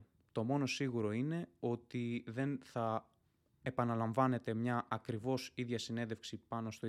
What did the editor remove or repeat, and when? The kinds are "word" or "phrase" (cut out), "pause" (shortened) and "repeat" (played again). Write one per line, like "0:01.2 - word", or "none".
none